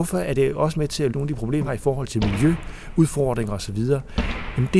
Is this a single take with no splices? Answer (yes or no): no